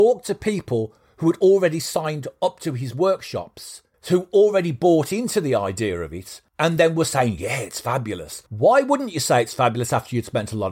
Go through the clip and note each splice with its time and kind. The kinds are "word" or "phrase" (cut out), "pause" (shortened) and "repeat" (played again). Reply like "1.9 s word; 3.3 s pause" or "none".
8.5 s pause